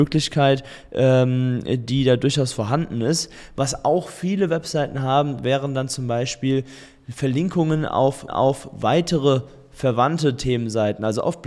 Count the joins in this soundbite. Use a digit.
1